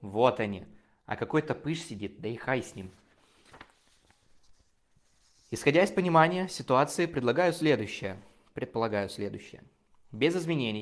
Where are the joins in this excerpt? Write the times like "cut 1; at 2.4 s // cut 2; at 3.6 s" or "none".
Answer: none